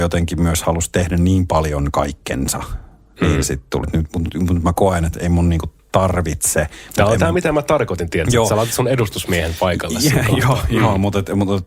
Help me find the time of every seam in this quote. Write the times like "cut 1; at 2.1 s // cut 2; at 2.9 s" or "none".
cut 1; at 3.8 s

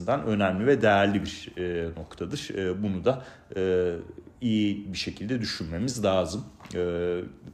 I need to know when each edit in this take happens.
cut 1; at 4.3 s

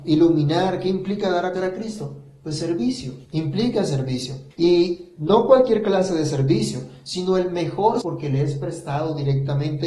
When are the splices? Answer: cut 1; at 1.6 s // cut 2; at 3.2 s // cut 3; at 4.5 s // cut 4; at 8.0 s

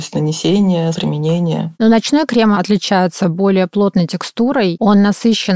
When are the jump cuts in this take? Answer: cut 1; at 0.9 s // cut 2; at 2.5 s

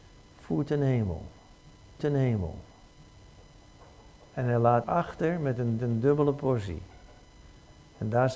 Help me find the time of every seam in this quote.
cut 1; at 2.0 s // cut 2; at 4.8 s // cut 3; at 5.8 s

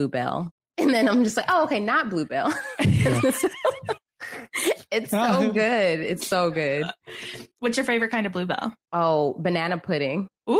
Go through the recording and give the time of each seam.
cut 1; at 7.5 s // cut 2; at 8.8 s

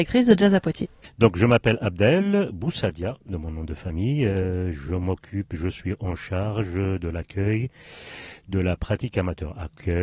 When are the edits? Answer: none

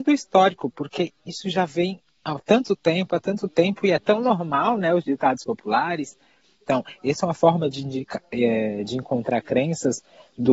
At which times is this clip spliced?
none

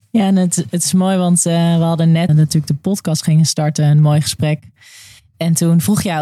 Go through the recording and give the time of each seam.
cut 1; at 2.3 s

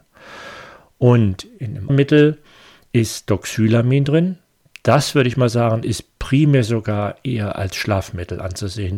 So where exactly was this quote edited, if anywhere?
cut 1; at 1.9 s

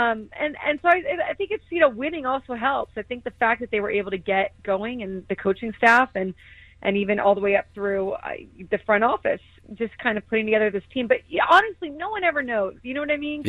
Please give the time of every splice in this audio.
none

